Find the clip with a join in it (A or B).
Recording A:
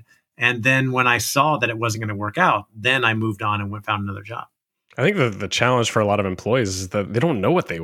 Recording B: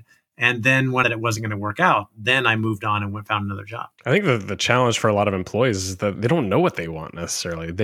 B